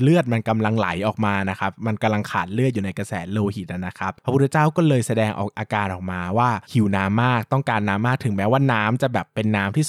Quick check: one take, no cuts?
no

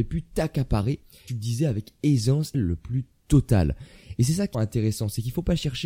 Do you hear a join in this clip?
yes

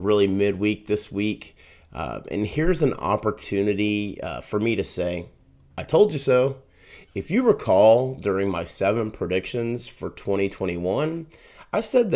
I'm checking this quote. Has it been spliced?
no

